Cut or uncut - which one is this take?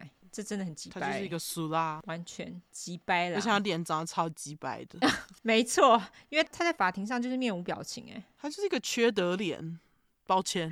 cut